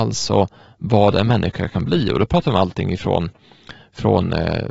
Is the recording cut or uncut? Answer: uncut